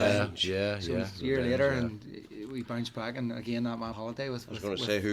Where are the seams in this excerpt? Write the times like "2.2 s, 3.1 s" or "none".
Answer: 3.9 s

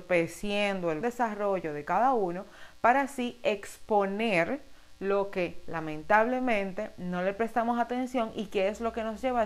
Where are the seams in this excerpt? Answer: 1.0 s

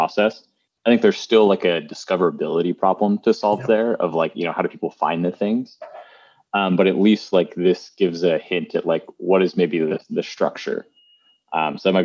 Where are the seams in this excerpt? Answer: none

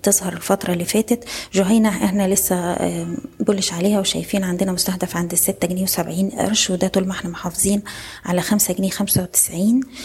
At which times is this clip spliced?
none

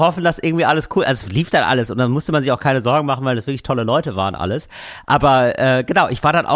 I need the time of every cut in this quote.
none

